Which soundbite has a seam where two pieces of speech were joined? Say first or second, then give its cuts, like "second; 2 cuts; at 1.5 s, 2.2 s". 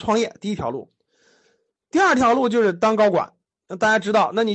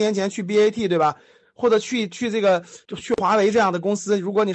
second; 1 cut; at 2.9 s